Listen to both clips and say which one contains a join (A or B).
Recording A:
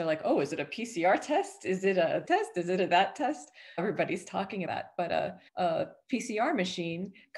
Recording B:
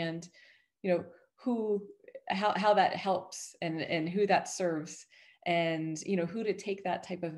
A